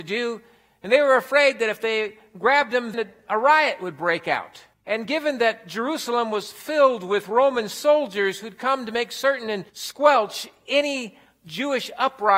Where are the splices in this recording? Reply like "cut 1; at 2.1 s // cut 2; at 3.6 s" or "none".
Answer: cut 1; at 2.9 s // cut 2; at 4.7 s // cut 3; at 9.7 s

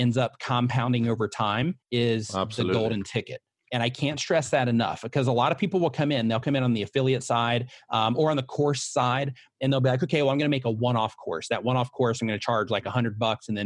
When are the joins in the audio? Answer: cut 1; at 1.8 s

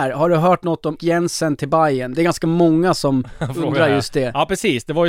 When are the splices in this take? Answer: cut 1; at 1.0 s

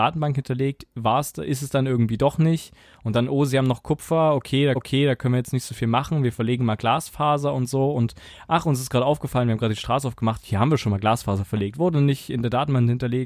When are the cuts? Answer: cut 1; at 4.8 s

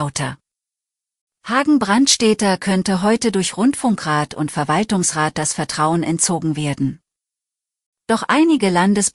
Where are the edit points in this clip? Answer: none

